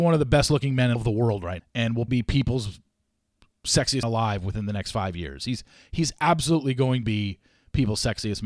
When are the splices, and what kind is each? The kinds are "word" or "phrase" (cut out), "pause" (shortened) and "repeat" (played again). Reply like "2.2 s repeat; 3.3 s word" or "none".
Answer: 1.0 s word; 1.6 s word; 2.1 s word; 4.0 s word; 7.0 s word